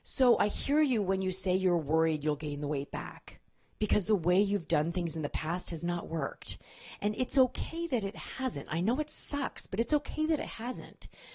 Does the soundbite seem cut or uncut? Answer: uncut